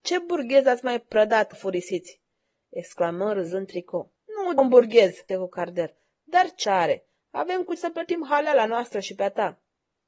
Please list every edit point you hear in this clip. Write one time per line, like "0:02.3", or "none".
0:01.5
0:04.2
0:04.6
0:05.3
0:06.6
0:07.8

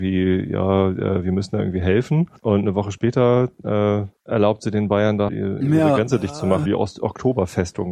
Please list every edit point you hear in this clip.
0:02.4
0:04.2
0:05.3
0:06.7

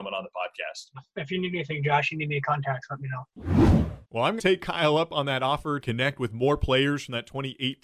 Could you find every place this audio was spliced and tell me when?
0:04.0
0:04.4
0:05.8

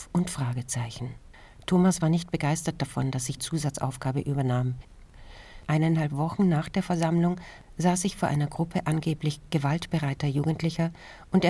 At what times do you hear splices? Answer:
0:03.4

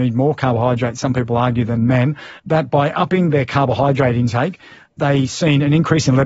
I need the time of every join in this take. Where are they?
0:02.4

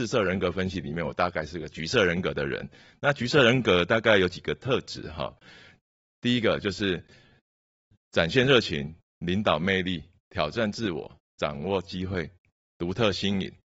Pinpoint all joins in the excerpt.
none

